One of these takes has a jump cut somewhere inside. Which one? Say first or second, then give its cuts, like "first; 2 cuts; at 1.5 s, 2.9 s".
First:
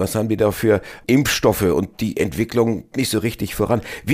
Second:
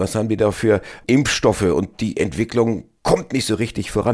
first; 1 cut; at 2.9 s